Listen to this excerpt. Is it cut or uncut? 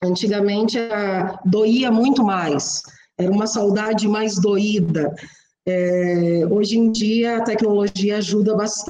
uncut